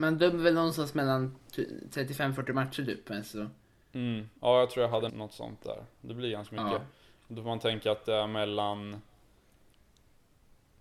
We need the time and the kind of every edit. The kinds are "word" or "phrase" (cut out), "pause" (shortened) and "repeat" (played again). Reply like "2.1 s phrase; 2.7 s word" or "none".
4.4 s pause; 5.1 s word